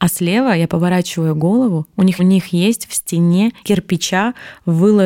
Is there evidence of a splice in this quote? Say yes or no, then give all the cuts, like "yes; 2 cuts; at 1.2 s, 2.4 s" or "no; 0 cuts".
yes; 2 cuts; at 2.2 s, 3.6 s